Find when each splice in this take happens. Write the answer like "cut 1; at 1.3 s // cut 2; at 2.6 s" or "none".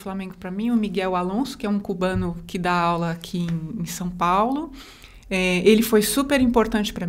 none